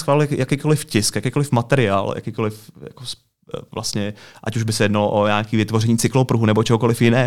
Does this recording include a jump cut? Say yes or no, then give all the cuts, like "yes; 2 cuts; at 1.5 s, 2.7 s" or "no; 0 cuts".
no; 0 cuts